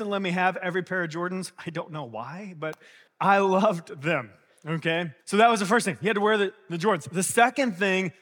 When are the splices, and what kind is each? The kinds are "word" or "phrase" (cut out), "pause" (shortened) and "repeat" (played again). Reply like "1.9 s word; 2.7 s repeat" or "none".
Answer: 3.1 s word; 5.2 s pause